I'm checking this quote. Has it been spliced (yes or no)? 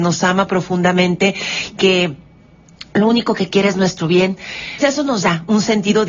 yes